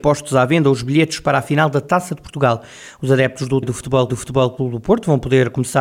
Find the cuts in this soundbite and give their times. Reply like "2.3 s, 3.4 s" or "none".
3.6 s, 4.1 s